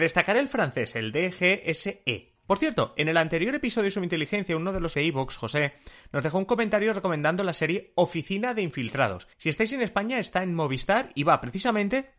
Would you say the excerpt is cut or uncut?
cut